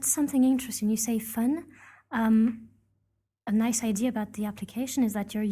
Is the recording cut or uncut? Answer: uncut